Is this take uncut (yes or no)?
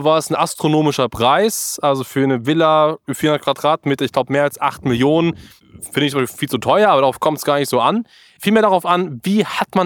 yes